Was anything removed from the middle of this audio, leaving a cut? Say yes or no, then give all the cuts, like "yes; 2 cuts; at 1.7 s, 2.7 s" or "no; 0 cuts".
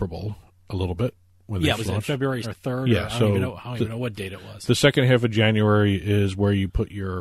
yes; 2 cuts; at 1.8 s, 2.4 s